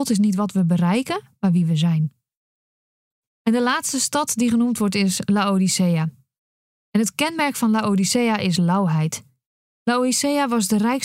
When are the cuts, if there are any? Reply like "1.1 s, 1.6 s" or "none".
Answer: none